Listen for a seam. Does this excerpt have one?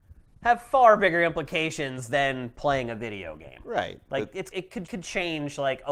yes; 2 cuts; at 4.5 s, 4.9 s

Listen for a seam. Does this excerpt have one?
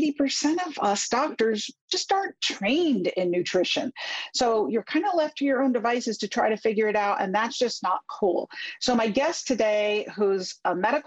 no; 0 cuts

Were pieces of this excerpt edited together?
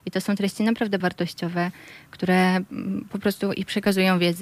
yes; 1 cut; at 1.0 s

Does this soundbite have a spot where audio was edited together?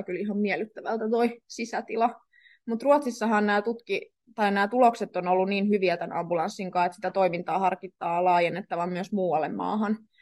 no; 0 cuts

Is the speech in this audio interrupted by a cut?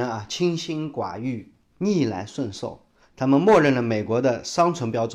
no; 0 cuts

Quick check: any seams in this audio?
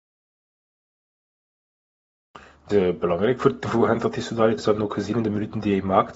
yes; 2 cuts; at 2.7 s, 4.6 s

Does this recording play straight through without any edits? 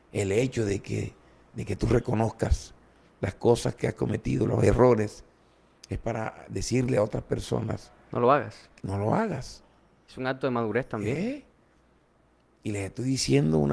yes; 0 cuts

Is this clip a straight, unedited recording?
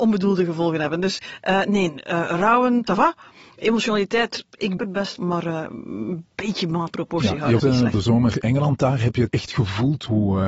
no; 8 cuts; at 2.9 s, 4.8 s, 5.2 s, 6.9 s, 7.6 s, 7.9 s, 8.4 s, 9.3 s

